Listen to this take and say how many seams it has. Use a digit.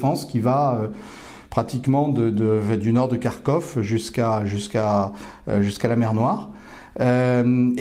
0